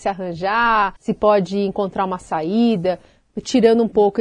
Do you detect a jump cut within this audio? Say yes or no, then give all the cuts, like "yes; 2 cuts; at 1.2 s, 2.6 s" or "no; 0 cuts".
yes; 1 cut; at 1.0 s